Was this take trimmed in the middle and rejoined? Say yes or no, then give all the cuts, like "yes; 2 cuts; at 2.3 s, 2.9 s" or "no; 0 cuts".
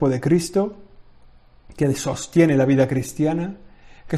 no; 0 cuts